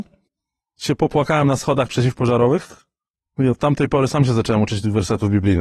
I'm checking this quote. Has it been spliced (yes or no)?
no